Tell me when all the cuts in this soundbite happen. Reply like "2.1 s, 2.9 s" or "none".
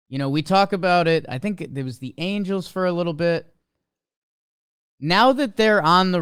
none